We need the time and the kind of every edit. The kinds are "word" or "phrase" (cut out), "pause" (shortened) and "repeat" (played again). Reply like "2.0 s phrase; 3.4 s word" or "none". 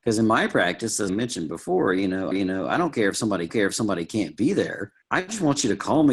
1.1 s word; 2.3 s repeat; 3.5 s repeat; 5.0 s pause